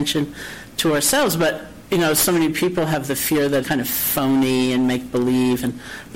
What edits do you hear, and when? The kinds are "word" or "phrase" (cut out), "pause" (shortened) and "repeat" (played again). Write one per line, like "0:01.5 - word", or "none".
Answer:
0:03.6 - word